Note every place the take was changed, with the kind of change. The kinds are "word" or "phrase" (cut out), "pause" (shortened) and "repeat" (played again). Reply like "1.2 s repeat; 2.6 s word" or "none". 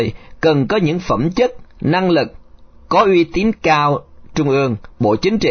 2.8 s pause; 4.3 s word